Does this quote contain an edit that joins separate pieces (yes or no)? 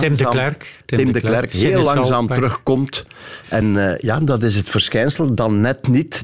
no